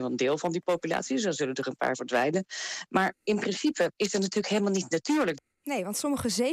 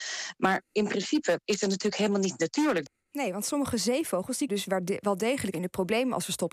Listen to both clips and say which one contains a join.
second; 2 cuts; at 4.5 s, 5.5 s

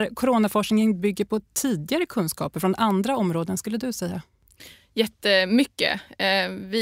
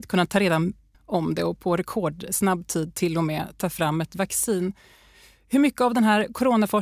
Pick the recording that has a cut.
second; 1 cut; at 0.9 s

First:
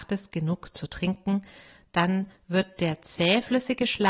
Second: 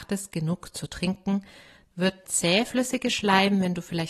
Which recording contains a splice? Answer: second; 2 cuts; at 1.9 s, 2.2 s

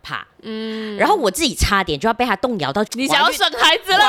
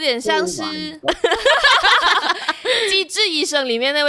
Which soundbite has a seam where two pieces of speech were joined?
first; 1 cut; at 2.9 s

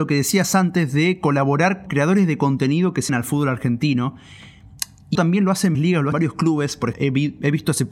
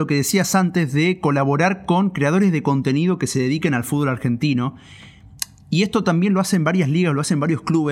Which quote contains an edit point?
first; 6 cuts; at 1.9 s, 3.1 s, 5.1 s, 5.7 s, 6.1 s, 6.9 s

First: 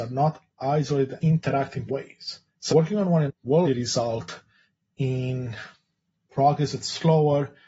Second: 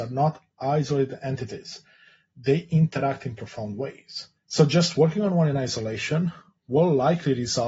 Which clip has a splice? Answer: first; 5 cuts; at 1.2 s, 1.9 s, 2.7 s, 3.3 s, 3.6 s

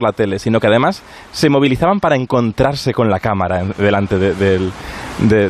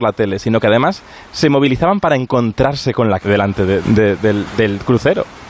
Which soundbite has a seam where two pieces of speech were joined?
second; 2 cuts; at 3.2 s, 3.8 s

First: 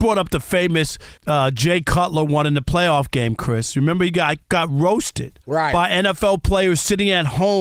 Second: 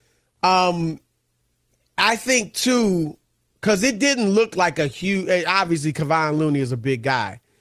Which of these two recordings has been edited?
first; 3 cuts; at 1.2 s, 4.4 s, 5.4 s

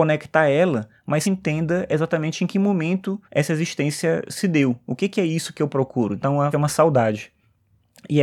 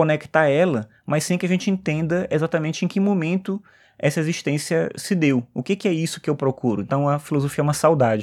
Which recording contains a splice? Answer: first; 3 cuts; at 1.2 s, 3.2 s, 6.5 s

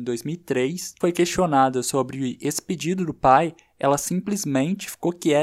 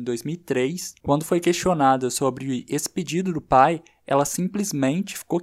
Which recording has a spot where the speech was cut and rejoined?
first; 1 cut; at 1.0 s

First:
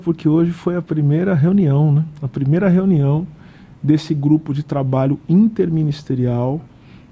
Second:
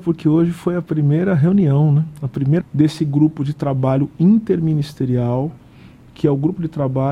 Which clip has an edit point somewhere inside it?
second; 1 cut; at 2.6 s

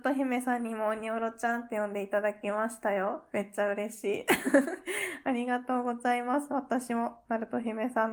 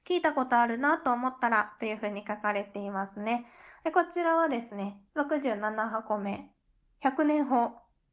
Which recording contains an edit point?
second; 1 cut; at 5.1 s

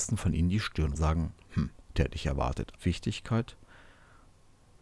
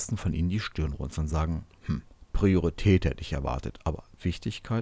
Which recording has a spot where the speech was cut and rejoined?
first; 3 cuts; at 0.9 s, 1.9 s, 2.7 s

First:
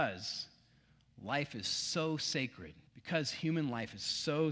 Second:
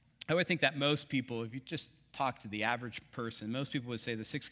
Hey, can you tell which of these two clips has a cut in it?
first; 1 cut; at 2.9 s

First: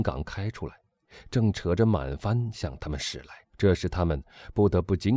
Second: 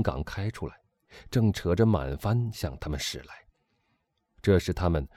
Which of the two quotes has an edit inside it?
first; 1 cut; at 3.4 s

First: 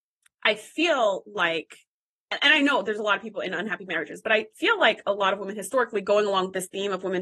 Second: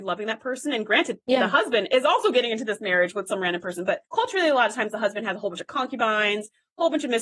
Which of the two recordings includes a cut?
second; 1 cut; at 4.0 s

